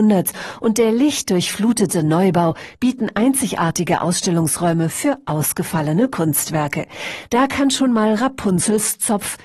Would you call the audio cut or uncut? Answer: uncut